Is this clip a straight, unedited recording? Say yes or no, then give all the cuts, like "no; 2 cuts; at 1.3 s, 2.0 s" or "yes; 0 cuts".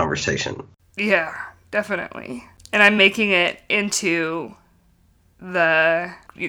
yes; 0 cuts